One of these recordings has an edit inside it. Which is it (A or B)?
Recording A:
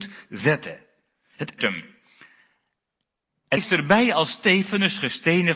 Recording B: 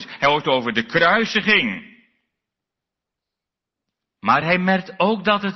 A